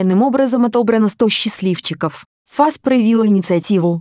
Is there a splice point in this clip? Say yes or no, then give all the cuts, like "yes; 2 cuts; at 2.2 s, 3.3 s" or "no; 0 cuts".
no; 0 cuts